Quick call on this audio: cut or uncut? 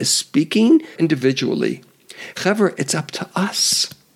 cut